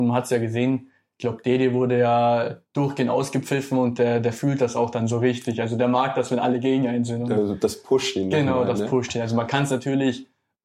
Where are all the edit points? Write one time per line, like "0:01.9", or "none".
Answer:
none